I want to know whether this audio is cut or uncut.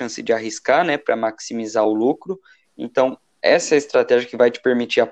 uncut